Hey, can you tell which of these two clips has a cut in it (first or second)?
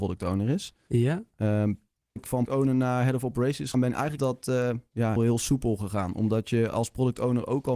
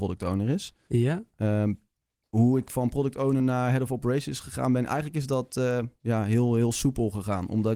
first